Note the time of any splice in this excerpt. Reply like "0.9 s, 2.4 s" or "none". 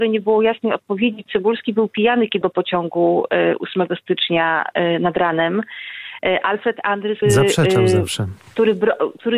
1.3 s, 2.4 s, 7.2 s